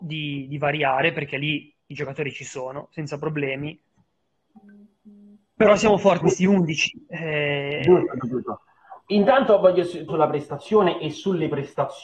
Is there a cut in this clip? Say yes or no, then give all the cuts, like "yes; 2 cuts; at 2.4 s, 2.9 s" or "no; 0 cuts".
yes; 3 cuts; at 6.2 s, 8.2 s, 10.1 s